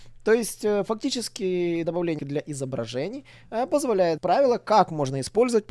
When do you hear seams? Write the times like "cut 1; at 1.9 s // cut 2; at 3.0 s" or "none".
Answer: cut 1; at 1.8 s // cut 2; at 2.2 s // cut 3; at 4.2 s